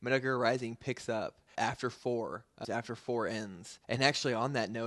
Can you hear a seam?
yes; 3 cuts; at 1.5 s, 2.6 s, 3.8 s

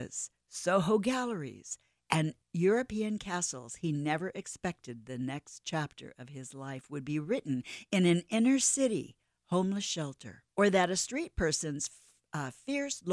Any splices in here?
yes; 2 cuts; at 2.4 s, 10.5 s

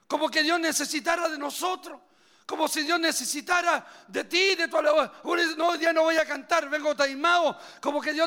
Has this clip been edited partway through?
no; 0 cuts

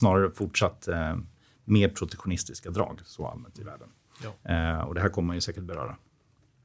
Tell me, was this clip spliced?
no; 0 cuts

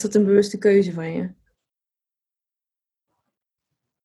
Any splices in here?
no; 0 cuts

